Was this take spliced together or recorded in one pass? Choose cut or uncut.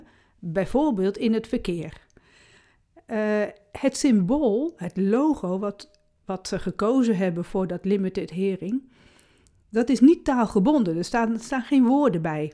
uncut